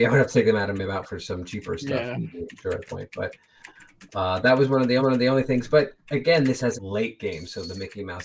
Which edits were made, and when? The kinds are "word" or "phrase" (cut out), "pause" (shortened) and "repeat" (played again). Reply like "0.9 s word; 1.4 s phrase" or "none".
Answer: 2.8 s word; 5.0 s repeat; 6.7 s phrase